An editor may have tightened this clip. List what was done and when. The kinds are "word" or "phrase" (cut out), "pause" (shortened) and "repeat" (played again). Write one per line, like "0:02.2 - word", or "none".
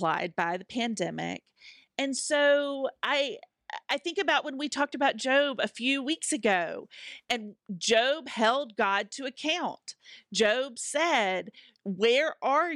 none